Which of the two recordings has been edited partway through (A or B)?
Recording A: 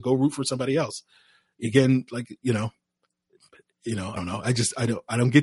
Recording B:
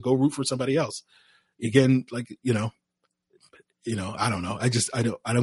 A